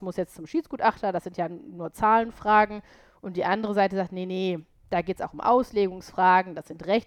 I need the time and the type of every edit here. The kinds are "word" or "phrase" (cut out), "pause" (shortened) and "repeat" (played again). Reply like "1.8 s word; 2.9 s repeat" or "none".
none